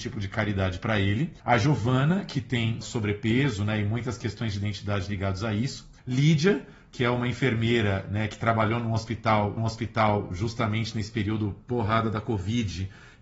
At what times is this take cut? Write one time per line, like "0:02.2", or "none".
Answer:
0:01.4
0:02.8
0:06.0
0:09.6

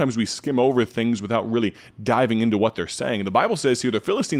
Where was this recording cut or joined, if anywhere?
none

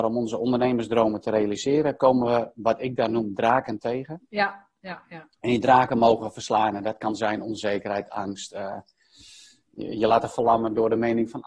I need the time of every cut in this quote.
none

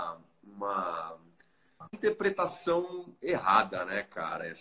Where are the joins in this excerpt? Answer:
0:01.9

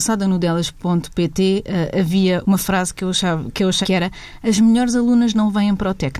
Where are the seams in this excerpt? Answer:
0:02.4
0:03.8

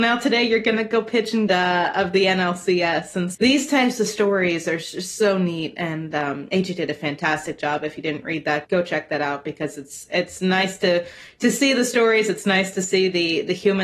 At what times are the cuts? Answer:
0:01.5
0:03.3
0:08.6

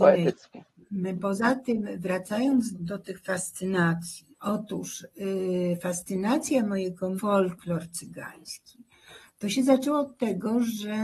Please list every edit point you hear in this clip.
0:02.7
0:04.3
0:07.2

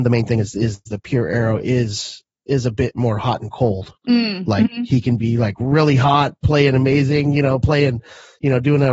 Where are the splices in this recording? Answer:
0:04.0

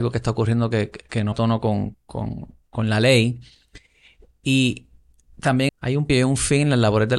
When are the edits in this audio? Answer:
0:01.3
0:01.9
0:05.7
0:06.1

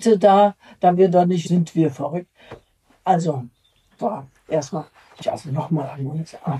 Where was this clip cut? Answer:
0:01.0
0:01.5
0:04.0
0:05.2

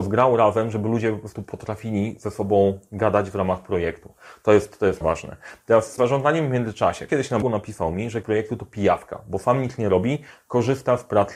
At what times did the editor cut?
0:05.0
0:06.0
0:07.1
0:07.4
0:08.2

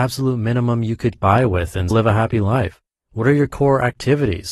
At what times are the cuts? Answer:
0:01.2
0:01.9
0:02.9

